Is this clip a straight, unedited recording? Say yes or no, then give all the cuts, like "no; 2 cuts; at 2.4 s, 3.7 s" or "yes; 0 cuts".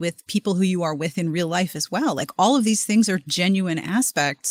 yes; 0 cuts